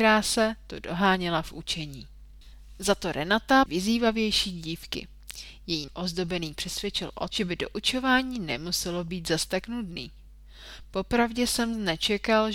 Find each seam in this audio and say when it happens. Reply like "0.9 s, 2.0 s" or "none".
3.7 s, 5.9 s, 6.5 s, 7.3 s